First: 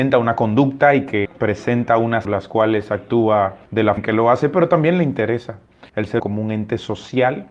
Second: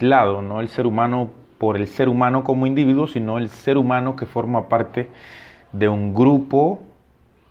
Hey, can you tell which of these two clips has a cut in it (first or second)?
first